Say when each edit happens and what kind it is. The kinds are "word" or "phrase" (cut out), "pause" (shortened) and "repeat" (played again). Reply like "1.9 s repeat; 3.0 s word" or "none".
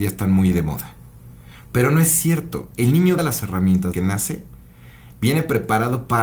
3.2 s phrase; 3.9 s word